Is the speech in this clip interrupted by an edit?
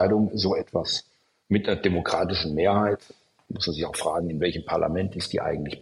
no; 0 cuts

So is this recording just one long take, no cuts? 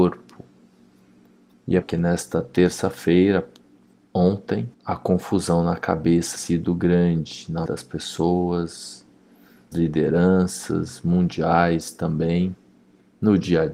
no; 5 cuts; at 1.8 s, 4.7 s, 6.4 s, 7.7 s, 9.7 s

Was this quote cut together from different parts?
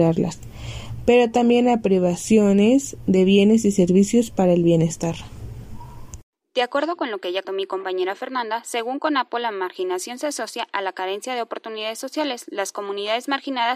yes; 1 cut; at 7.4 s

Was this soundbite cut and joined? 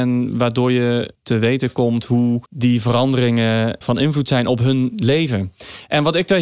yes; 3 cuts; at 1.1 s, 2.5 s, 3.8 s

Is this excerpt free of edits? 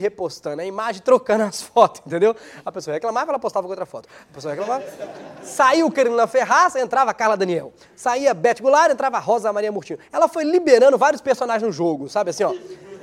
yes; 0 cuts

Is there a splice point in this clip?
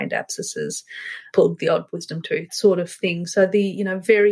yes; 1 cut; at 2.5 s

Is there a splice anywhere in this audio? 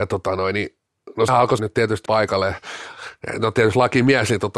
yes; 3 cuts; at 1.3 s, 1.6 s, 2.1 s

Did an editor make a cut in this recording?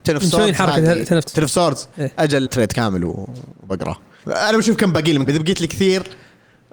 yes; 4 cuts; at 1.2 s, 2.5 s, 4.2 s, 5.3 s

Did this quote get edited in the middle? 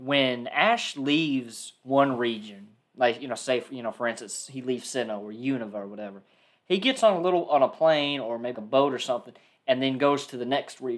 yes; 1 cut; at 8.5 s

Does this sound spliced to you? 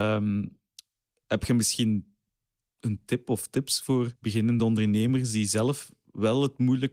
no; 0 cuts

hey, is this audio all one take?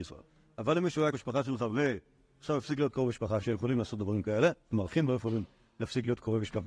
no; 2 cuts; at 1.1 s, 3.4 s

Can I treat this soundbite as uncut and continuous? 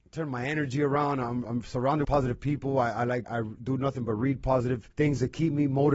no; 4 cuts; at 1.4 s, 2.0 s, 3.2 s, 4.9 s

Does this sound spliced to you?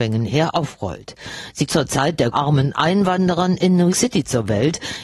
yes; 3 cuts; at 1.7 s, 2.3 s, 3.9 s

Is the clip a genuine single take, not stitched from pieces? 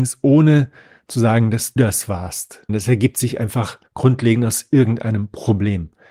no; 3 cuts; at 1.8 s, 2.7 s, 3.9 s

